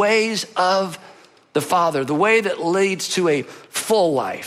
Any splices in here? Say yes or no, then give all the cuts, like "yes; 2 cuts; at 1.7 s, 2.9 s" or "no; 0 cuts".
no; 0 cuts